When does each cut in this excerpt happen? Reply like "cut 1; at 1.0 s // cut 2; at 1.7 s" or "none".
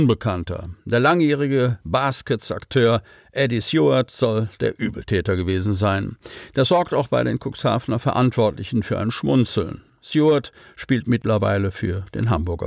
none